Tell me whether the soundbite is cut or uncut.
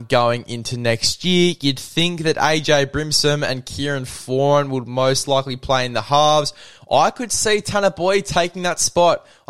uncut